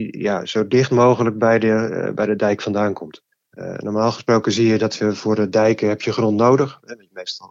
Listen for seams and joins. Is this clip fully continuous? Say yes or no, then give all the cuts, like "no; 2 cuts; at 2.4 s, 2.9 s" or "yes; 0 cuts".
no; 1 cut; at 3.3 s